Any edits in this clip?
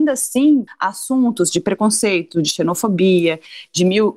no; 0 cuts

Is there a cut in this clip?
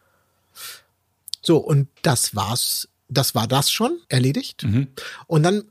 yes; 2 cuts; at 2.0 s, 4.0 s

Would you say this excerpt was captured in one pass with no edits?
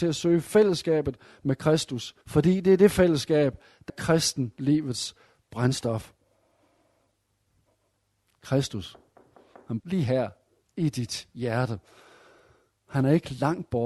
no; 3 cuts; at 2.2 s, 3.9 s, 9.8 s

